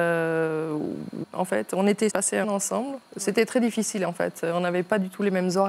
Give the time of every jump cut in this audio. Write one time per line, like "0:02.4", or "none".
0:01.2
0:02.1
0:02.4